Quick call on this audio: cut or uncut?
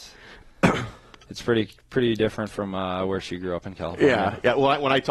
uncut